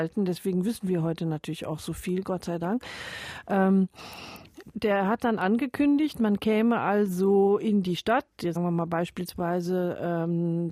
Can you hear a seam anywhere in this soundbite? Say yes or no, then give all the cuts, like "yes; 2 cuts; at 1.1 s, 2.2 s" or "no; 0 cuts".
yes; 2 cuts; at 4.7 s, 8.6 s